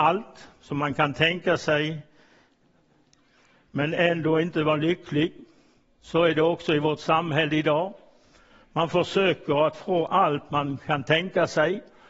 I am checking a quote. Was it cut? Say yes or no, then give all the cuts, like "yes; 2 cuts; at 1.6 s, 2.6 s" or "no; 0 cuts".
no; 0 cuts